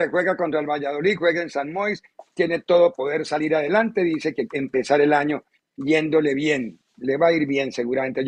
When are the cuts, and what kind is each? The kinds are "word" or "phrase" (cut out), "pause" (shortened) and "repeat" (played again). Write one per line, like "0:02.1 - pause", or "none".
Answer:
0:02.9 - word
0:04.5 - word